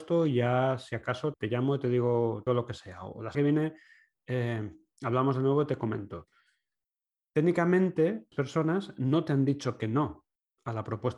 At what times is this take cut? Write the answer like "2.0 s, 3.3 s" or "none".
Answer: 1.3 s, 2.5 s, 3.3 s, 8.3 s